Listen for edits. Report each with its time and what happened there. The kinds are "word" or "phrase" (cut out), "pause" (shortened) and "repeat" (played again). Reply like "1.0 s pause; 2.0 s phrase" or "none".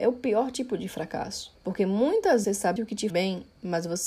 1.6 s pause; 2.4 s word; 2.8 s word; 3.1 s word